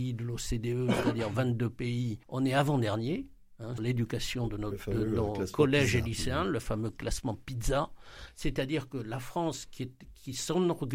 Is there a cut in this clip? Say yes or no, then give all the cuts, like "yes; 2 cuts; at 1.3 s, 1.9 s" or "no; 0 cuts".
yes; 2 cuts; at 2.2 s, 3.8 s